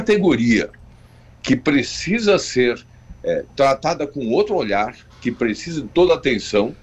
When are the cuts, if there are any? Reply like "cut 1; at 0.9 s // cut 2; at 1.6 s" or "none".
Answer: none